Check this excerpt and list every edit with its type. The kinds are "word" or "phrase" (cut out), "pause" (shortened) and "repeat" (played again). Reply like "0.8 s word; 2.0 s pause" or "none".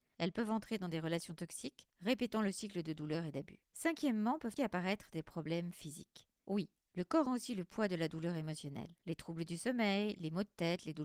1.9 s pause; 3.6 s pause; 4.6 s word; 7.3 s word; 9.0 s pause

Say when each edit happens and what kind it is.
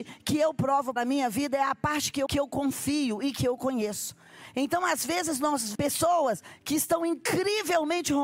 1.0 s word; 2.3 s word; 5.7 s word

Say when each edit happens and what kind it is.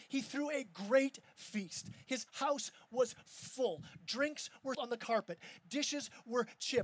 4.7 s word

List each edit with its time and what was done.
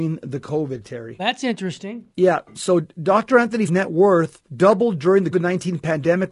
2.1 s pause; 3.7 s word; 4.5 s pause; 5.3 s word

